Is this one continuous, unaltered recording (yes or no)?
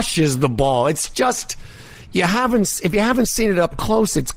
yes